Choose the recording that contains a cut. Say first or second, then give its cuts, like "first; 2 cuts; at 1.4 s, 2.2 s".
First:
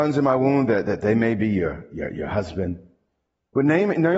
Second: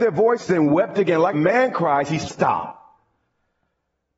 second; 2 cuts; at 1.3 s, 2.3 s